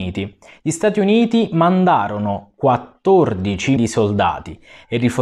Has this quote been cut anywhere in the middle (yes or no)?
yes